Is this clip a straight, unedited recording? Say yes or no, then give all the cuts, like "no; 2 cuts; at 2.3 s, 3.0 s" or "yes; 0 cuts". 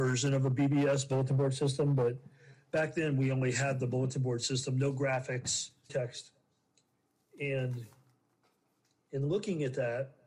no; 1 cut; at 5.9 s